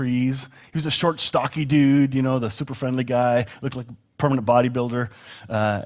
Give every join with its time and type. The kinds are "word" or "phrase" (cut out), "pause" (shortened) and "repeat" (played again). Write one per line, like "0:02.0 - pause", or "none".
none